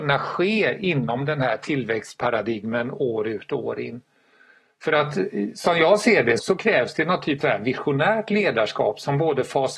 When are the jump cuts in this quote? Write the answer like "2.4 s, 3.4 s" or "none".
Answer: 6.4 s, 7.4 s